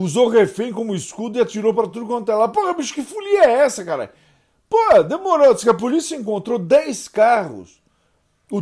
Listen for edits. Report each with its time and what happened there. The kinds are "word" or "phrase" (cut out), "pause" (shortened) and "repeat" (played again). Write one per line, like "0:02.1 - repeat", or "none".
none